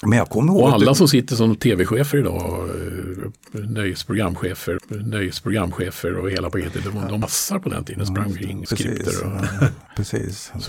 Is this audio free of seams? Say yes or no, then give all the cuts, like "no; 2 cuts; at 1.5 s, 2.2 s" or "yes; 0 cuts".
no; 3 cuts; at 4.8 s, 7.2 s, 8.7 s